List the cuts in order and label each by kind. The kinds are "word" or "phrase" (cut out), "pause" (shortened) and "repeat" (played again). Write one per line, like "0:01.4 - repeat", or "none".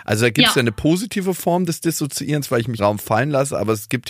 0:02.8 - phrase

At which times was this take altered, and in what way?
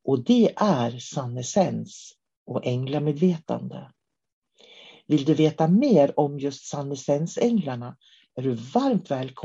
none

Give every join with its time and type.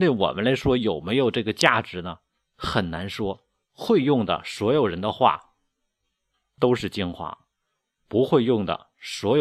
none

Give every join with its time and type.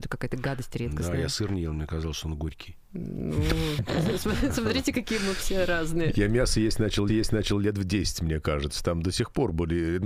0:04.9 - word
0:07.1 - repeat

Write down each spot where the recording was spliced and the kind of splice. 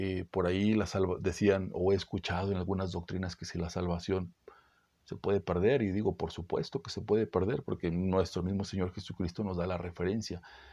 none

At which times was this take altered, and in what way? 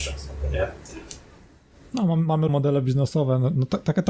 0:02.5 - word

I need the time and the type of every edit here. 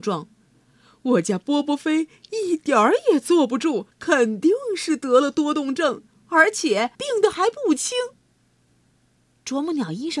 0:03.9 - pause
0:06.9 - pause
0:08.2 - pause

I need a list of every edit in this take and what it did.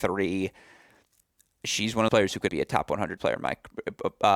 0:02.1 - word
0:02.5 - word
0:03.2 - word

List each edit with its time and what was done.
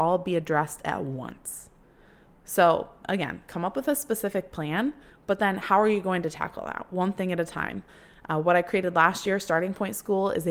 none

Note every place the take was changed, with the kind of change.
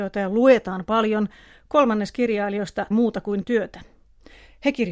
0:02.9 - word
0:03.4 - word

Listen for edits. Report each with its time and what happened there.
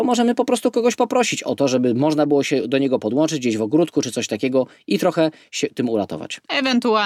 none

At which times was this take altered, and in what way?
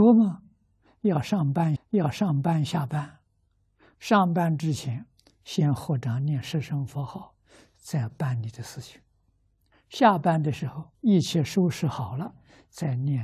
0:01.8 - repeat
0:10.9 - pause

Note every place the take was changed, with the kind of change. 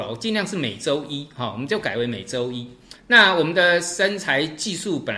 0:03.0 - pause

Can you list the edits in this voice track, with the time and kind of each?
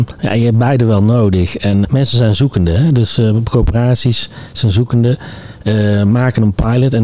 0:01.8 - word

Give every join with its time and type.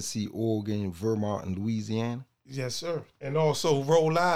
0:03.1 - pause

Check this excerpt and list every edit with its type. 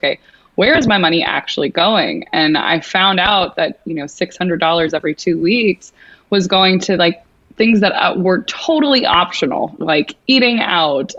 none

